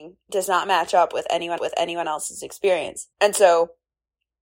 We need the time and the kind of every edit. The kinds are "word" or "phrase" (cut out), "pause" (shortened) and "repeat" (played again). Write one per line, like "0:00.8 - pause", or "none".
0:01.6 - repeat
0:03.1 - pause